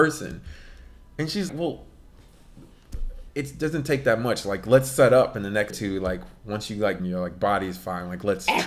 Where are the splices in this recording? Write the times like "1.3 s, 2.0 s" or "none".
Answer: 1.5 s, 3.3 s, 5.7 s, 7.0 s